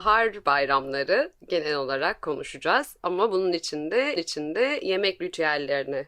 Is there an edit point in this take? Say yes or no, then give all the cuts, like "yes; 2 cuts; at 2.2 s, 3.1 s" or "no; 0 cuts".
yes; 1 cut; at 4.2 s